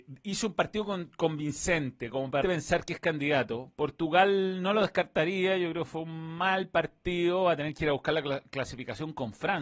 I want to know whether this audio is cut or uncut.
cut